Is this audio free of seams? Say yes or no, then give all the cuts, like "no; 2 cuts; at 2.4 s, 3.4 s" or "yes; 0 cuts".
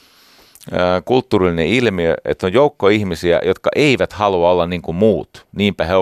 yes; 0 cuts